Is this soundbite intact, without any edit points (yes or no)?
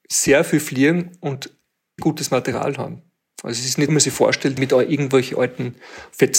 no